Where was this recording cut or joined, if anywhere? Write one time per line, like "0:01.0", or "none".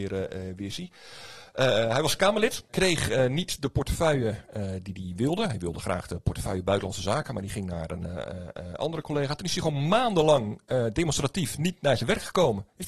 none